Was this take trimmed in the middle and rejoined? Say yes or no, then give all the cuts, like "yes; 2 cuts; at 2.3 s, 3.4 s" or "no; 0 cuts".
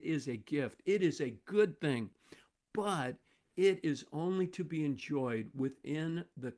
no; 0 cuts